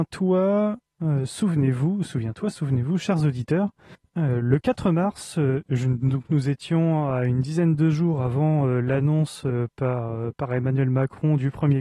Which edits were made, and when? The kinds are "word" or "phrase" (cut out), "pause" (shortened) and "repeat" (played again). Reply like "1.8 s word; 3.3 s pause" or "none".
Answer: 3.9 s pause